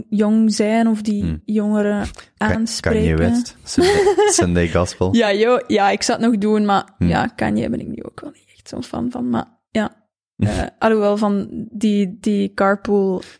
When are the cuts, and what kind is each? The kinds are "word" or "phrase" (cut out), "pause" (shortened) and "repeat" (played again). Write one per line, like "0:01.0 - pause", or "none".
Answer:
none